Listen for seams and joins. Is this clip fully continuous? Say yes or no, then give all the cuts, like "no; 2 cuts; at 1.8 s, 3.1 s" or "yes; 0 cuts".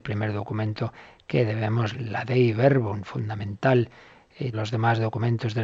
no; 2 cuts; at 1.9 s, 4.5 s